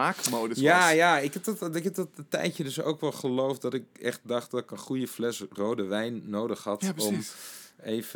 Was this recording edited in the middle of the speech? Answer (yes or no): no